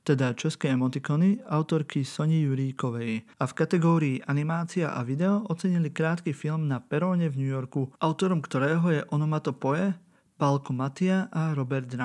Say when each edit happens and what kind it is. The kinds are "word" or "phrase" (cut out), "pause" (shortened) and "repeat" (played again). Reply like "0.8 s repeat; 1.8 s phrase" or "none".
3.3 s pause; 8.0 s pause